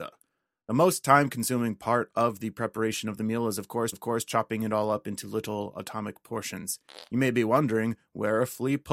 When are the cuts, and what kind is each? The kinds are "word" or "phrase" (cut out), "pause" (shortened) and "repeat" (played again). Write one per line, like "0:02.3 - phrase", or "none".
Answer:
0:03.9 - repeat